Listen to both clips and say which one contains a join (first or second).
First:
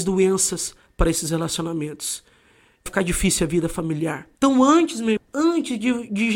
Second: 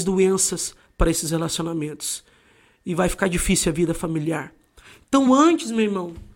first